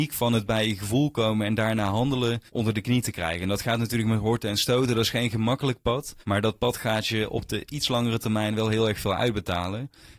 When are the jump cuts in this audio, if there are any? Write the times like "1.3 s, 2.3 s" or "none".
2.5 s, 6.2 s